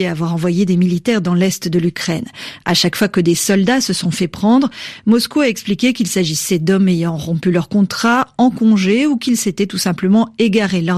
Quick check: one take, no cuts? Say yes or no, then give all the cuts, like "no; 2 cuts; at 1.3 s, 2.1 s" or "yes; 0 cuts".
yes; 0 cuts